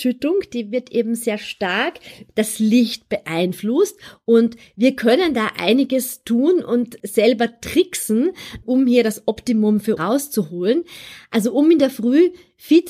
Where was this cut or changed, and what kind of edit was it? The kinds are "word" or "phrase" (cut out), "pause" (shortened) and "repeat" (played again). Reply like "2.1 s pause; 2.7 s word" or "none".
2.3 s word; 7.0 s word; 8.6 s word; 10.0 s word

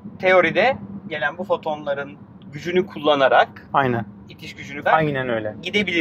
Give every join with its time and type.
1.1 s word; 4.9 s word

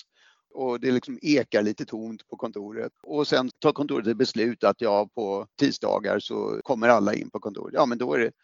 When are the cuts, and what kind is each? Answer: 3.0 s pause; 3.5 s word; 5.5 s pause

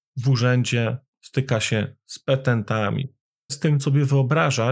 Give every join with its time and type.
1.1 s pause; 3.5 s phrase; 3.8 s phrase

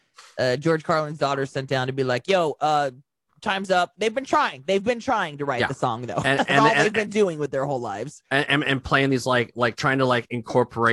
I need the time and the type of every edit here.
none

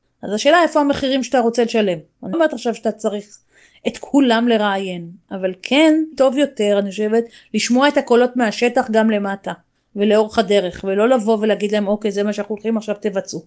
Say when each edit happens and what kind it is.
2.3 s word; 6.1 s word

